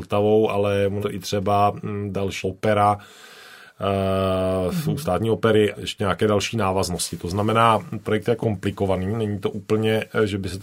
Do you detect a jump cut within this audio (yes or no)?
yes